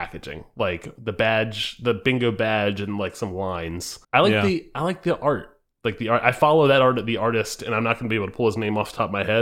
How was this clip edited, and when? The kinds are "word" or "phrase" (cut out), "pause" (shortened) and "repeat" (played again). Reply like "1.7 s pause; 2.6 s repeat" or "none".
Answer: 4.0 s pause